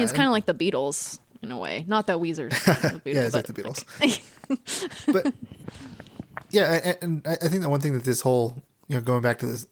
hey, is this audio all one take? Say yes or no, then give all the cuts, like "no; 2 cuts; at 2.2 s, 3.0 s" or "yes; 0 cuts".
no; 1 cut; at 3.3 s